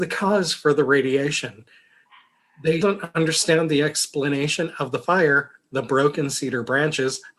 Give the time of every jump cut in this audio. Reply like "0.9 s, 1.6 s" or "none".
2.8 s